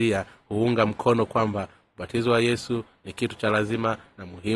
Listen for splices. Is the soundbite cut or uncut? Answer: uncut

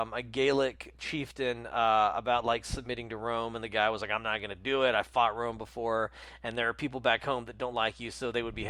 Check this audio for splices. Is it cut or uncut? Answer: uncut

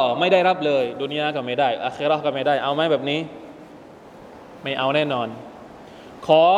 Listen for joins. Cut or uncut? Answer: uncut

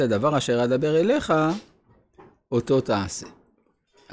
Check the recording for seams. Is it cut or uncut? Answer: uncut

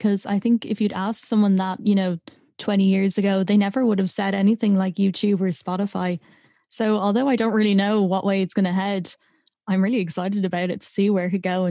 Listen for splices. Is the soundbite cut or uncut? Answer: uncut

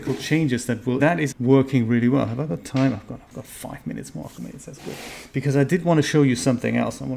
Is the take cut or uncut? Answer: cut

